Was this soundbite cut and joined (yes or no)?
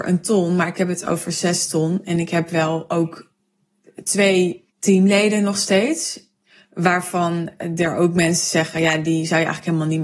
yes